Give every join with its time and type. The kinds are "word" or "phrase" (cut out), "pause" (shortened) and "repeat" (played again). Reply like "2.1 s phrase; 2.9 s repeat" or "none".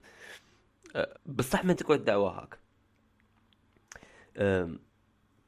1.2 s pause; 1.8 s word